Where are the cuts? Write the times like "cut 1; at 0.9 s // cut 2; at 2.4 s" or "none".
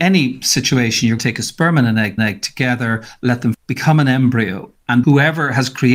cut 1; at 1.2 s // cut 2; at 2.2 s // cut 3; at 3.5 s // cut 4; at 5.0 s